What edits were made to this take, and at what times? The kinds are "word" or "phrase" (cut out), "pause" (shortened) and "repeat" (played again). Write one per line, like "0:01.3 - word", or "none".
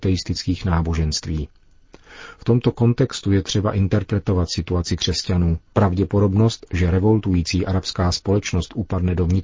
0:05.7 - pause